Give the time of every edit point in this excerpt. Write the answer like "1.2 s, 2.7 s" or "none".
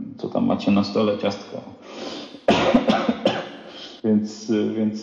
4.0 s